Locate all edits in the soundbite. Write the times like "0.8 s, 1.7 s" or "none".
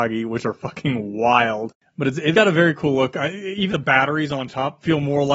2.3 s, 3.7 s